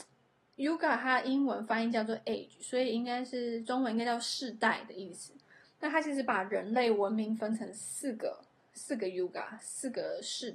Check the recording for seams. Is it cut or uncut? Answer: uncut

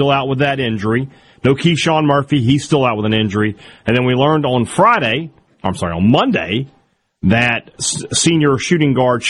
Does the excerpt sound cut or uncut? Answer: cut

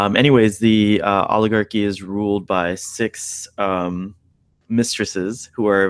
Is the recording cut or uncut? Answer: uncut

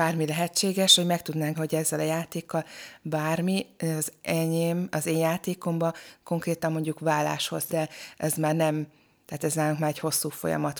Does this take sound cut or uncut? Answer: cut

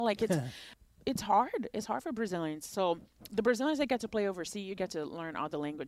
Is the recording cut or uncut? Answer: uncut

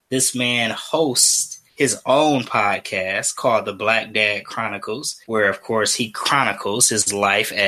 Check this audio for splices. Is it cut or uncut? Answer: cut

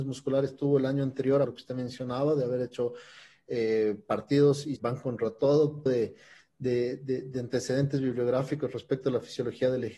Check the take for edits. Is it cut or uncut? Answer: cut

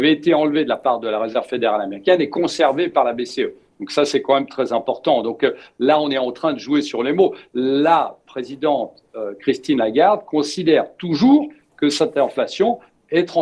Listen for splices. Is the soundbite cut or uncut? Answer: uncut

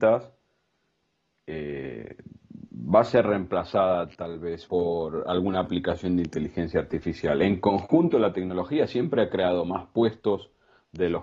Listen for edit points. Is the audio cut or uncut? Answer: cut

